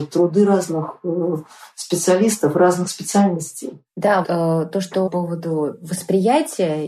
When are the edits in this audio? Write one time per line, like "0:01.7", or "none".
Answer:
0:04.2
0:05.1